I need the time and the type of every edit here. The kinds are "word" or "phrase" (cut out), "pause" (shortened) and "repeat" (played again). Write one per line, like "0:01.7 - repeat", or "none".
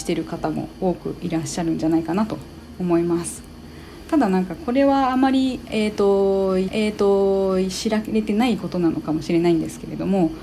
0:06.7 - repeat